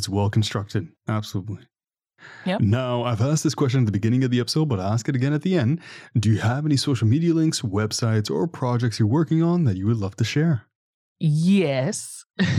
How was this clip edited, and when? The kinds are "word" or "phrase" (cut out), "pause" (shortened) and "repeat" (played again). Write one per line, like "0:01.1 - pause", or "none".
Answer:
0:01.0 - pause

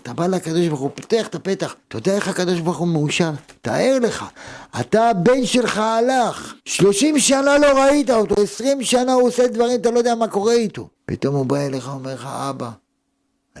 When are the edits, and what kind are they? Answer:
0:01.8 - pause
0:06.6 - pause
0:10.9 - pause

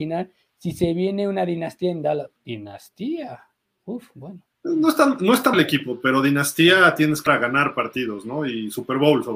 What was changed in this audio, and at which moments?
0:02.4 - pause
0:04.5 - pause
0:05.5 - word
0:07.3 - word

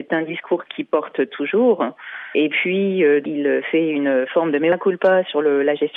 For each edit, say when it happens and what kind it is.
none

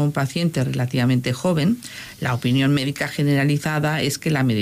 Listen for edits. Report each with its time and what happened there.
none

